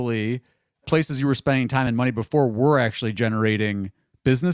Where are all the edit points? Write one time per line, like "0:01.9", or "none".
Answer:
none